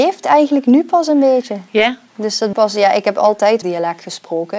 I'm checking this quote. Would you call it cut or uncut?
cut